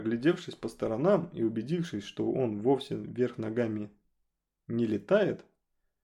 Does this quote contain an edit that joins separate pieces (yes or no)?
no